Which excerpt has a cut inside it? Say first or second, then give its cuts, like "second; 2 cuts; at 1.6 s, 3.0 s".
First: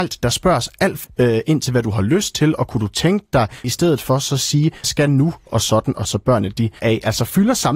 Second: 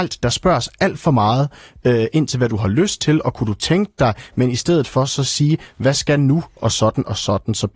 first; 5 cuts; at 1.0 s, 3.6 s, 4.8 s, 6.0 s, 6.8 s